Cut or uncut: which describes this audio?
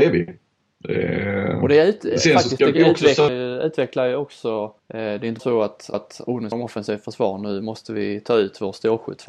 cut